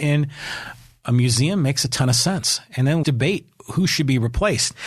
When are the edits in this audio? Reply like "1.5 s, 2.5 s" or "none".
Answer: 3.0 s